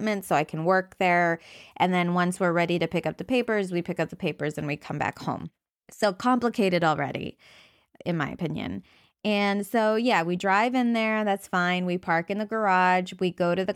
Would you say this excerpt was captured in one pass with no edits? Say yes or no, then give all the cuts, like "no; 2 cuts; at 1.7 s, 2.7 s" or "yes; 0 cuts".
yes; 0 cuts